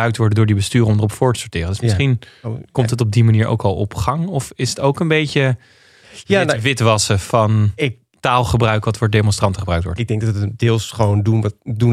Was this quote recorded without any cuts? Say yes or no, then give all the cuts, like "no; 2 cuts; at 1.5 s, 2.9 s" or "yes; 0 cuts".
yes; 0 cuts